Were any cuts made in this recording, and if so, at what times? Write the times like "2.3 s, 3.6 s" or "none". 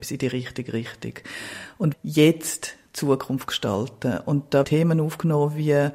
1.9 s, 4.6 s